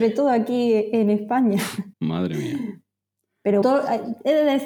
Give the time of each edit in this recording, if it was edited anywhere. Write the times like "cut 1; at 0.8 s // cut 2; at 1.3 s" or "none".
cut 1; at 1.9 s // cut 2; at 3.6 s